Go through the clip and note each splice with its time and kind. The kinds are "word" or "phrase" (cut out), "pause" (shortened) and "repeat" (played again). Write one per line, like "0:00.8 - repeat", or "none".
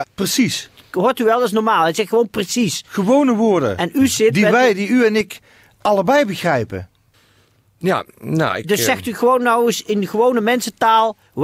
none